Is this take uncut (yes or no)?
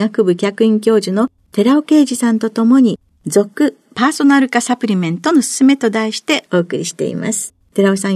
yes